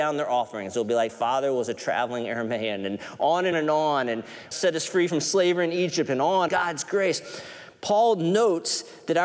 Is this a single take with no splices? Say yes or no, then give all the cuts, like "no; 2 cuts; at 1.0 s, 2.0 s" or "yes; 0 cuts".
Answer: no; 4 cuts; at 1.1 s, 3.5 s, 4.5 s, 6.5 s